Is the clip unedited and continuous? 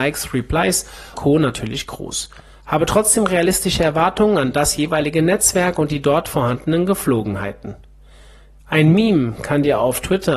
no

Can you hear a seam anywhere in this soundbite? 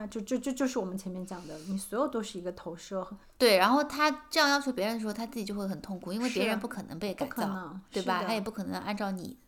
yes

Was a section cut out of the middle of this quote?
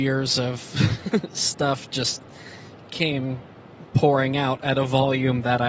no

